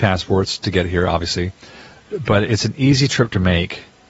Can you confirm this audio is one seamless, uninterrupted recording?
no; 1 cut; at 2.4 s

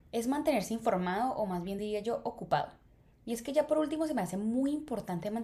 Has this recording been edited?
no; 0 cuts

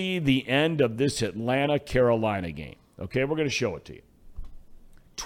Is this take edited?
no; 0 cuts

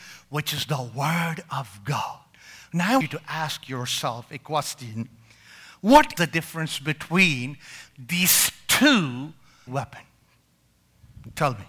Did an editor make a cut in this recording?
yes; 3 cuts; at 3.0 s, 6.2 s, 9.7 s

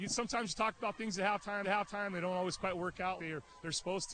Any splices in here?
yes; 2 cuts; at 1.6 s, 3.2 s

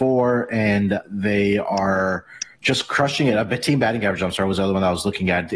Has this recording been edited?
yes; 2 cuts; at 1.0 s, 2.5 s

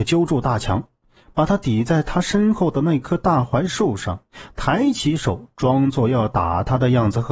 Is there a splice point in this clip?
no; 0 cuts

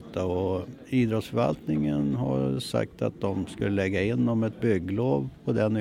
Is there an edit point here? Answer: no; 0 cuts

